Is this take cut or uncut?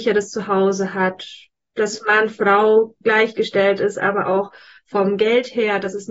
uncut